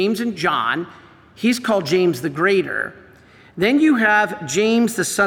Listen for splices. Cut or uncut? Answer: uncut